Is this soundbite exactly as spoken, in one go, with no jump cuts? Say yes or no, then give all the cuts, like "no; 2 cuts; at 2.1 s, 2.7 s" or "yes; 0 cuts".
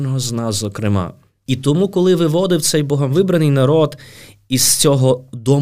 yes; 0 cuts